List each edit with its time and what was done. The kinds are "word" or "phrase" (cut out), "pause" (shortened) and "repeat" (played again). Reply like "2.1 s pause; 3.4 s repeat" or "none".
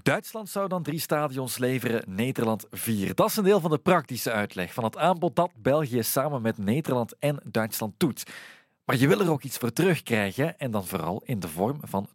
none